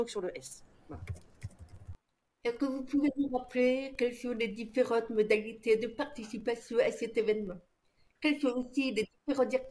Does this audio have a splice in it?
no; 0 cuts

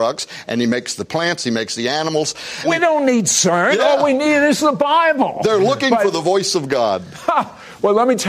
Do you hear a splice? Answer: no; 0 cuts

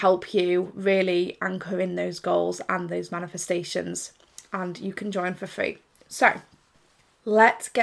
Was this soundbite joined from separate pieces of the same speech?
no; 0 cuts

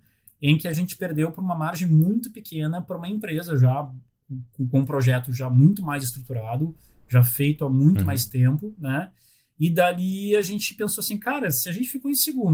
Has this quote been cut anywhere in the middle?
no; 0 cuts

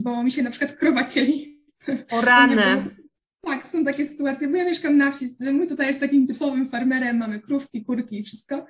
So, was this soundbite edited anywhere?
no; 0 cuts

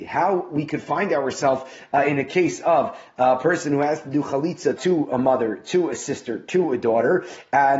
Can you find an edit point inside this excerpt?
yes; 1 cut; at 4.8 s

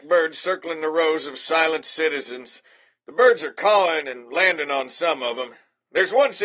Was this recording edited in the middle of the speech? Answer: no; 0 cuts

